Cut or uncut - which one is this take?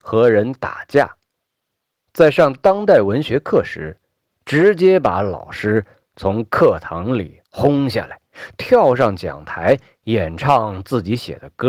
uncut